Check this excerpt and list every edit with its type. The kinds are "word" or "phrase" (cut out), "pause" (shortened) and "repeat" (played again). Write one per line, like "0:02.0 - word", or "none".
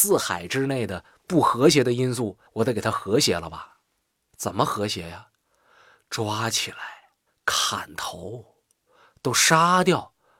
0:02.5 - pause
0:07.3 - pause